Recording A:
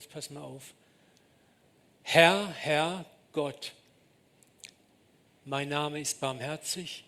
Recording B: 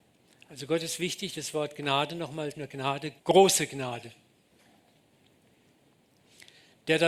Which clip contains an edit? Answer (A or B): B